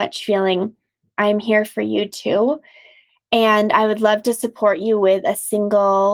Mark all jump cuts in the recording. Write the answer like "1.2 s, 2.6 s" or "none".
none